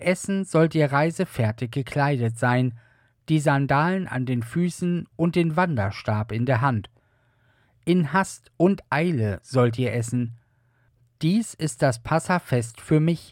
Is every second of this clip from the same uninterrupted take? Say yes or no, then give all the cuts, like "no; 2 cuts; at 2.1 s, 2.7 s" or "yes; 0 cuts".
yes; 0 cuts